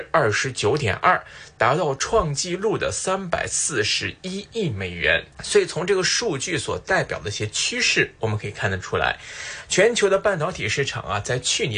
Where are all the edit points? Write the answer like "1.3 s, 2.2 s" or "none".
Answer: 5.3 s